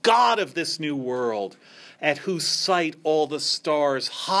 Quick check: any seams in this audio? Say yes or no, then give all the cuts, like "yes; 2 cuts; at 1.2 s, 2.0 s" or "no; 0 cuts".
no; 0 cuts